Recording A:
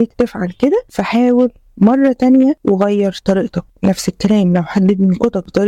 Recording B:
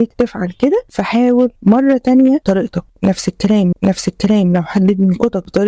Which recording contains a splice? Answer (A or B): B